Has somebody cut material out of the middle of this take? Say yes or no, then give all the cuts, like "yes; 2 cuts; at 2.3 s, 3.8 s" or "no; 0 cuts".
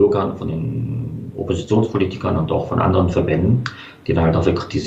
no; 0 cuts